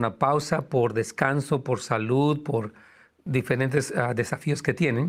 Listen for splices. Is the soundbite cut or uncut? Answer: uncut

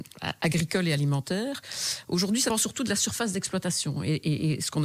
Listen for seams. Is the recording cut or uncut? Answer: cut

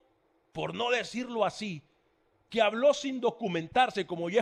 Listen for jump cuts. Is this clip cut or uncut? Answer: uncut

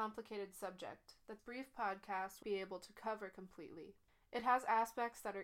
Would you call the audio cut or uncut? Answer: cut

